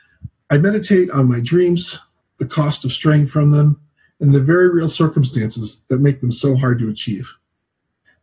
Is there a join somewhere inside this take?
no; 0 cuts

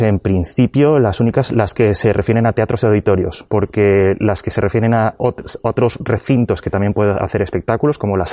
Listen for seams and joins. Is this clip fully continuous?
yes; 0 cuts

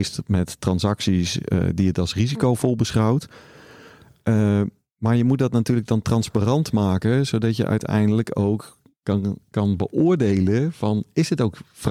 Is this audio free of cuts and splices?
yes; 0 cuts

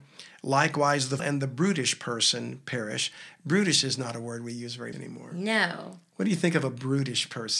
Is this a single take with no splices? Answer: no; 2 cuts; at 1.2 s, 4.9 s

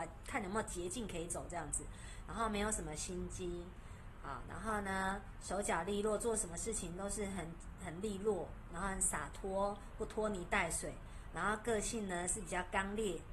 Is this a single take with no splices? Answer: no; 1 cut; at 8.7 s

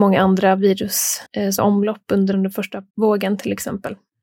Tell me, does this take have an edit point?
yes; 4 cuts; at 1.3 s, 1.6 s, 2.3 s, 2.9 s

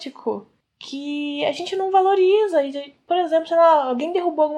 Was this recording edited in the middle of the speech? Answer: no; 0 cuts

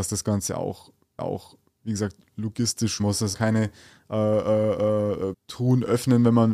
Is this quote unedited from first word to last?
no; 4 cuts; at 1.2 s, 3.0 s, 3.3 s, 5.3 s

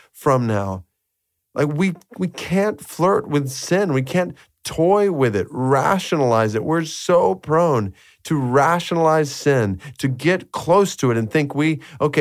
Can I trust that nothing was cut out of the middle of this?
yes; 0 cuts

